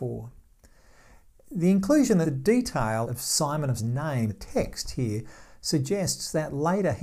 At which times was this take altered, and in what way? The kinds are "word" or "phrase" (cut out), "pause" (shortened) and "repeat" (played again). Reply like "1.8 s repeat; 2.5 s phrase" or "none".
2.2 s word; 3.0 s word; 3.8 s word; 4.3 s word